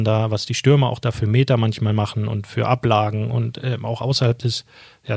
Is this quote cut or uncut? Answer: uncut